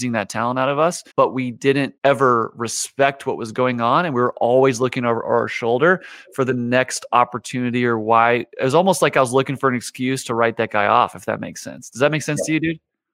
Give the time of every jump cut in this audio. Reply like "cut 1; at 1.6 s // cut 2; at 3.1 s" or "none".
cut 1; at 1.1 s // cut 2; at 2.0 s